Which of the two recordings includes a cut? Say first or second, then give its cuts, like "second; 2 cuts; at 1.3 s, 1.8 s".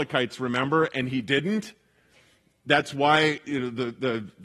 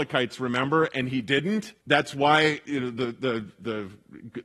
second; 1 cut; at 1.8 s